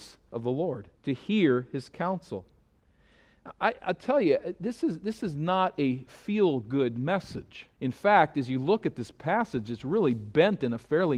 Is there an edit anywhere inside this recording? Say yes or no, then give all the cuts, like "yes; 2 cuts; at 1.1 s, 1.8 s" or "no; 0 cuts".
yes; 2 cuts; at 1.0 s, 7.7 s